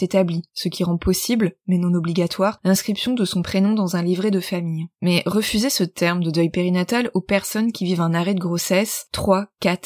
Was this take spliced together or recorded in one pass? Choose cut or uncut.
cut